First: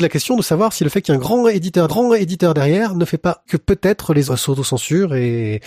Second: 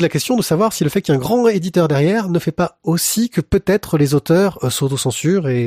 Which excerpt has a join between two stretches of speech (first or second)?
first